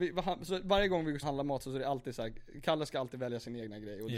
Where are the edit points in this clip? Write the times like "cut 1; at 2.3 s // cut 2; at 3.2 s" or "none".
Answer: cut 1; at 1.2 s

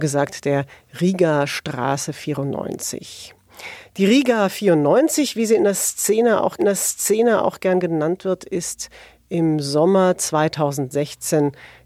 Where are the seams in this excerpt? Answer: cut 1; at 6.6 s

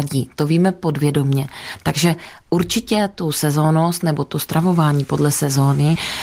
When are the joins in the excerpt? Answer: none

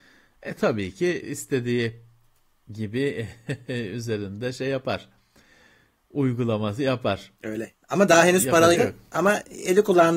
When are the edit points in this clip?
cut 1; at 1.2 s // cut 2; at 7.3 s // cut 3; at 8.7 s

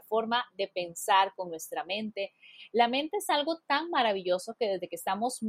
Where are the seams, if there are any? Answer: none

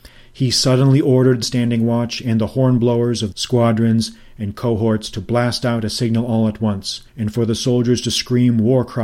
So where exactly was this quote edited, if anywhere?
cut 1; at 1.4 s // cut 2; at 3.3 s // cut 3; at 7.1 s

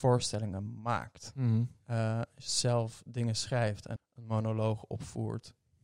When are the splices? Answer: cut 1; at 4.0 s

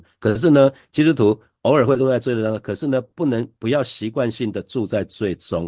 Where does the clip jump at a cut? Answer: none

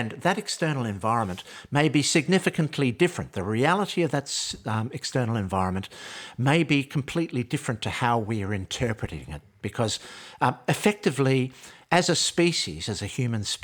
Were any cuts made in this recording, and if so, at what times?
none

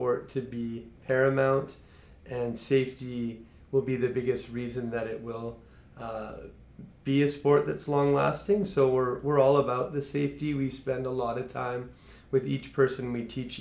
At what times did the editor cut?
none

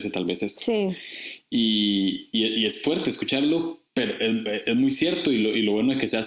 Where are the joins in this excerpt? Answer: cut 1; at 3.9 s

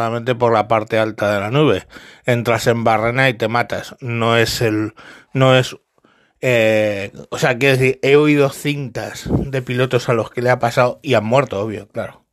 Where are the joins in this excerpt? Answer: none

